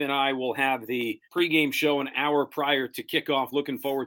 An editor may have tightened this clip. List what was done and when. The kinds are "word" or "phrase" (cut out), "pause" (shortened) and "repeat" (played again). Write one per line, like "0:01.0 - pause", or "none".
0:01.2 - pause